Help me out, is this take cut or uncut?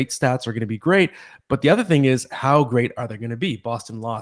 uncut